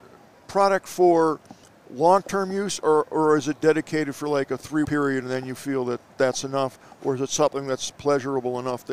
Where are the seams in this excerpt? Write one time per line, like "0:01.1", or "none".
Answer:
0:02.8
0:04.8
0:06.1